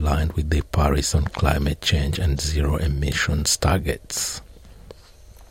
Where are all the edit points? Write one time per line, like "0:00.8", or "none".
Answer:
0:01.1